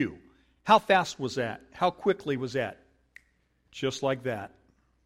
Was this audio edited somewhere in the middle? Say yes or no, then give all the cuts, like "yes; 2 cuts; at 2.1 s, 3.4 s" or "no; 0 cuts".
no; 0 cuts